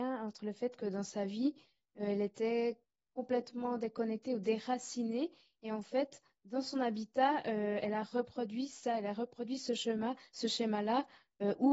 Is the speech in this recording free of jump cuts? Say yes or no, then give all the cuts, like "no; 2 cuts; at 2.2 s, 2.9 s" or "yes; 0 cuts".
yes; 0 cuts